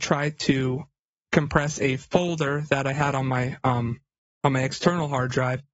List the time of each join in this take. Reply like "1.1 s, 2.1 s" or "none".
none